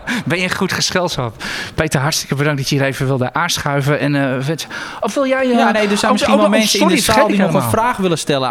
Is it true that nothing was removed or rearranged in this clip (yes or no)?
yes